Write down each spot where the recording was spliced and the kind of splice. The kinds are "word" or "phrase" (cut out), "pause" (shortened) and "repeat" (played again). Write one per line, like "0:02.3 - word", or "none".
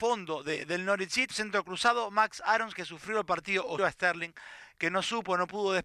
0:01.3 - word
0:03.8 - word